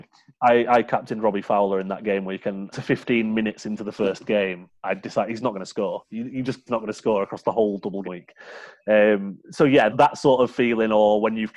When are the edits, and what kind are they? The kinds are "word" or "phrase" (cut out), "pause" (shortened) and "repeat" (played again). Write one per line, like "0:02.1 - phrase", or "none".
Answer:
0:02.7 - phrase
0:04.8 - pause
0:06.7 - phrase
0:08.0 - word
0:09.9 - word